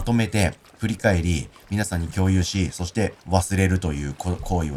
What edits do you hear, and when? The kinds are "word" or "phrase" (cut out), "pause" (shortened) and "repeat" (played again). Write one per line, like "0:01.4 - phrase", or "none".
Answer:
0:03.2 - pause